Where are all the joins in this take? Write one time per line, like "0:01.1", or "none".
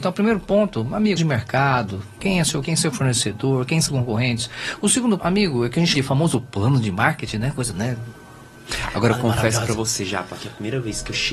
0:01.2
0:02.6
0:03.9
0:05.2
0:05.9
0:07.7